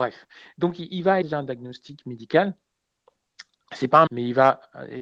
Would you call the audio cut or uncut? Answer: cut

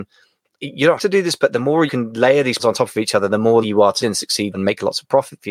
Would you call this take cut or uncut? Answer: cut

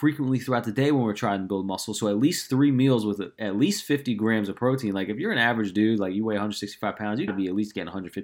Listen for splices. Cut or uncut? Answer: cut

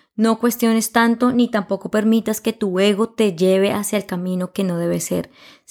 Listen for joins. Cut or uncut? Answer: uncut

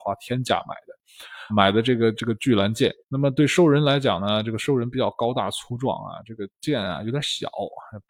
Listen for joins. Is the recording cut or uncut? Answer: cut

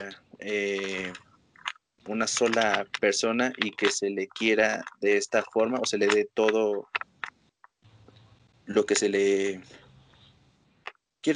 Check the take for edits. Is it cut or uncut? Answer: uncut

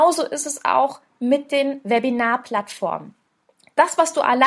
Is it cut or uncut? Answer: uncut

